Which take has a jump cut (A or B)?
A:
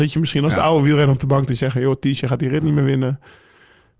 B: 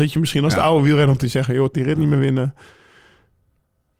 B